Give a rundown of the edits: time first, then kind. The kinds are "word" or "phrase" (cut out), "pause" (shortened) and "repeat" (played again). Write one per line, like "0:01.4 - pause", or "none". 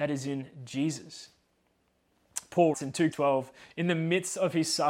0:02.7 - word
0:03.1 - word